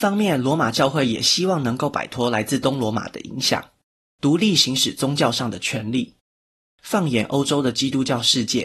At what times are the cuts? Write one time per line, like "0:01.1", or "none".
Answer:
none